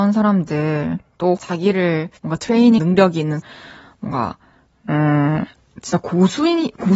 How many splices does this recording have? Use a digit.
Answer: 4